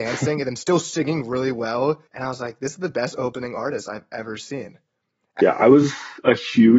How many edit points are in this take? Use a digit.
2